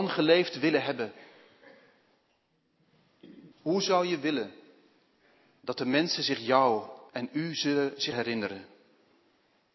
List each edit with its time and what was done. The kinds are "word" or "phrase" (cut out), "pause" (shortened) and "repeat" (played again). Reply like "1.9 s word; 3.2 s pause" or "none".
3.5 s pause; 7.1 s pause; 8.1 s word